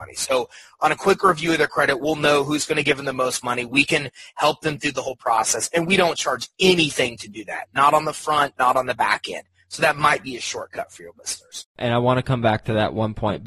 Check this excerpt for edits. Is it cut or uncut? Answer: uncut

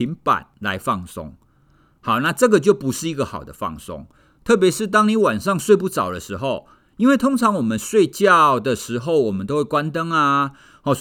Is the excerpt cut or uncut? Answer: uncut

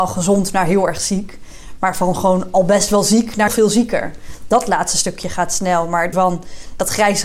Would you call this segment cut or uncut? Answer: cut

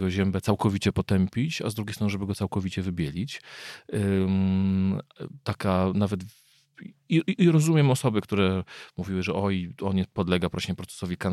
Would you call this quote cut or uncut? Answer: uncut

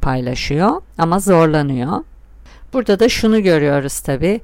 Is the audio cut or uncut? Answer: uncut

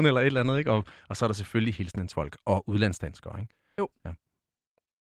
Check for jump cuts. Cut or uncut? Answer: cut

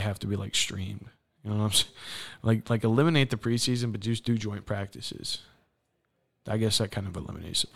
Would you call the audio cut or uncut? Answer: uncut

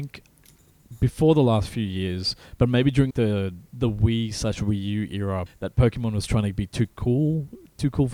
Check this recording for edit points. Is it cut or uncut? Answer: cut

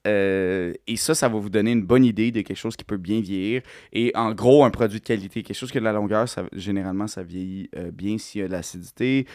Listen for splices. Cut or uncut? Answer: uncut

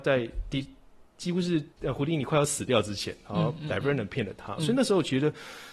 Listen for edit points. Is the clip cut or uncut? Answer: cut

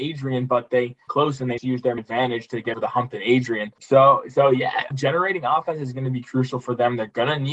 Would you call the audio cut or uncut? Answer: cut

